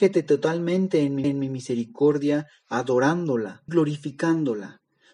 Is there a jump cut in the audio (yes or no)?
yes